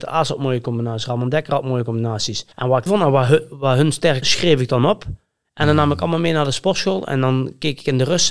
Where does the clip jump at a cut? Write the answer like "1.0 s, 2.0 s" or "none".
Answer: 2.5 s, 2.9 s, 4.2 s, 5.4 s